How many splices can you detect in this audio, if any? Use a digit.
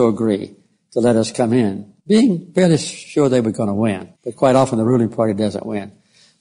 2